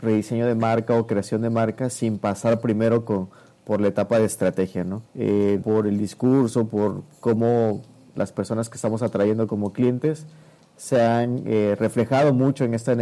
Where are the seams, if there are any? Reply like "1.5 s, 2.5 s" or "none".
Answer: 5.1 s, 5.6 s, 8.2 s